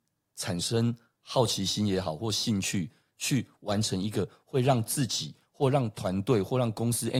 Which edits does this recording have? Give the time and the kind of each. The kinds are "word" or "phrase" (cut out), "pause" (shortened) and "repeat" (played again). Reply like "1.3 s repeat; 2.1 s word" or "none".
none